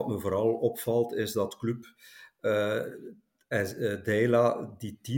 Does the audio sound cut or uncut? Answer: uncut